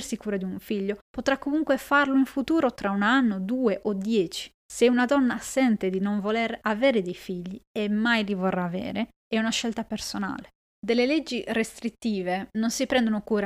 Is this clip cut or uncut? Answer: cut